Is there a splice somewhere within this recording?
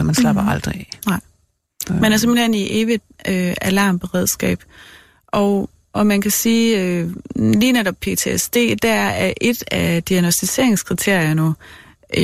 no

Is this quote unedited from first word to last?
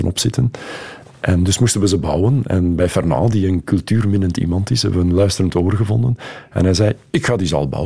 yes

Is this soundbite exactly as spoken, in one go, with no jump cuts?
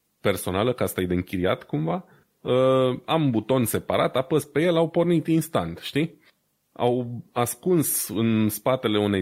yes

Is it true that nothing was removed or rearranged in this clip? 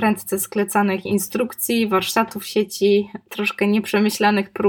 yes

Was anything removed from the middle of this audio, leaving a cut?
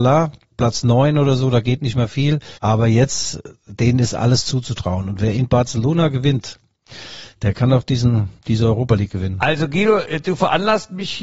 yes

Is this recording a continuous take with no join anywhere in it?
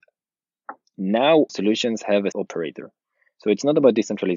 no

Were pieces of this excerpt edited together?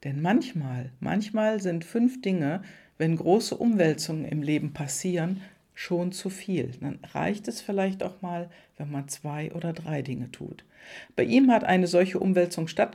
no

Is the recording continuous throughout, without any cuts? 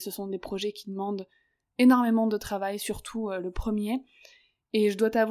yes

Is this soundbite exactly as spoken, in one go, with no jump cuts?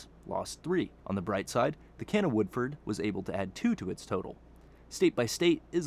no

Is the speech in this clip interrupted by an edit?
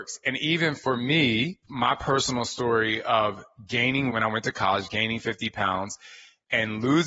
yes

